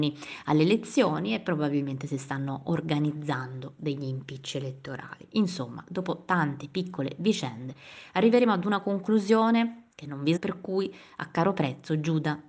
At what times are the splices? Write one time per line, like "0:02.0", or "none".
0:09.9
0:10.4